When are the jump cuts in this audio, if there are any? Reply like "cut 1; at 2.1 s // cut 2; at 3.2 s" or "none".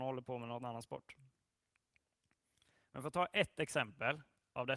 none